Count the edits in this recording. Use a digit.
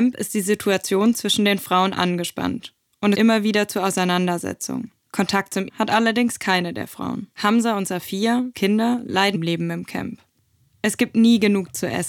6